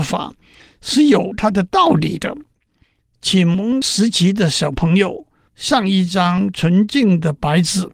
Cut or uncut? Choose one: uncut